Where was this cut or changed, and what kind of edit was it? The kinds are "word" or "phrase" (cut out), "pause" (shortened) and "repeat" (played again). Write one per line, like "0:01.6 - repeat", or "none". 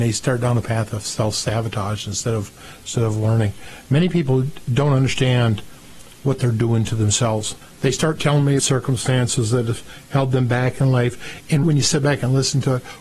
0:04.7 - word
0:07.6 - pause
0:08.6 - phrase
0:11.6 - word